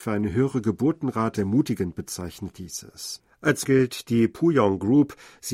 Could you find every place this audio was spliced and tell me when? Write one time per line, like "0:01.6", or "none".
0:01.3
0:03.6